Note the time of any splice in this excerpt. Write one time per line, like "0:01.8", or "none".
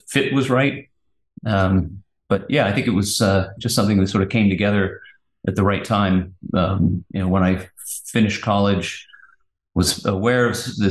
none